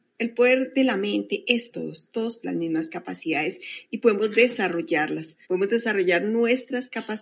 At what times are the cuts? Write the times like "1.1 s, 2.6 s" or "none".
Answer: 1.7 s, 2.4 s, 5.4 s